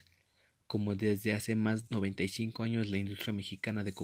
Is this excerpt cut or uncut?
cut